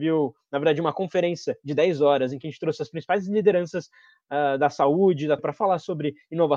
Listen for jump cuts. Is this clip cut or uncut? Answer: cut